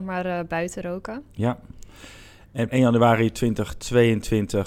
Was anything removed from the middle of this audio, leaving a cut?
yes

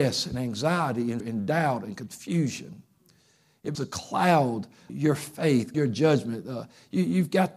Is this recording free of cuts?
no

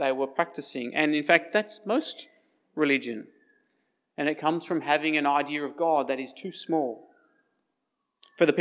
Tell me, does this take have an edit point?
no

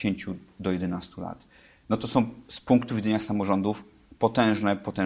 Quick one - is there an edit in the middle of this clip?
no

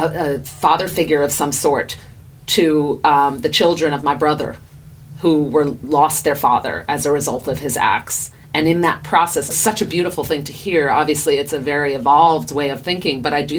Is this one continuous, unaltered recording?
no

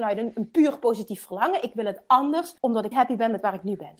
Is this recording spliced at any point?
yes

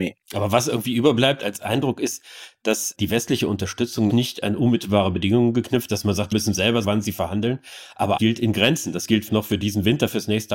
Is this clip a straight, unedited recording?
no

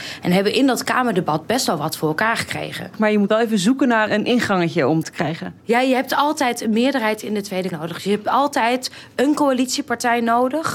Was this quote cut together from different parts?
yes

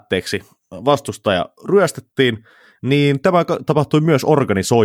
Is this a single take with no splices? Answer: yes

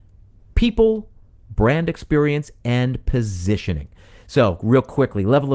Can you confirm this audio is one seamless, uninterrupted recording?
yes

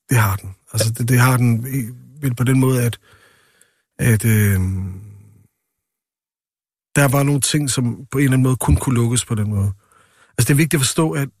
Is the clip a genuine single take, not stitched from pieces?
yes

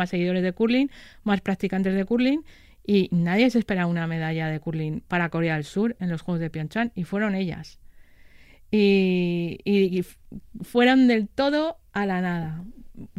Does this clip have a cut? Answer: no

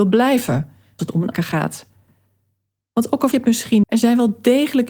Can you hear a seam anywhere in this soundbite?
yes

